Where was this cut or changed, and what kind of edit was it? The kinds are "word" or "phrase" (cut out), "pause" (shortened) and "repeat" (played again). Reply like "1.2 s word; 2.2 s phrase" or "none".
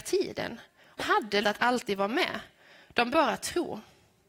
1.0 s word; 1.4 s word; 3.1 s word